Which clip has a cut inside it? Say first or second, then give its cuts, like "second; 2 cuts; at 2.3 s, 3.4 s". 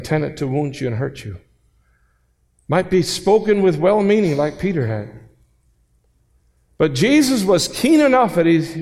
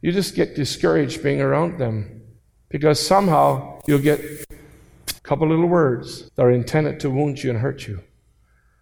second; 3 cuts; at 2.4 s, 5.2 s, 6.3 s